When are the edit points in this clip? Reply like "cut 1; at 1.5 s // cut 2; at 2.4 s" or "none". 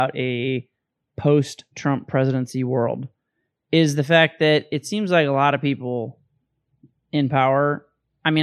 none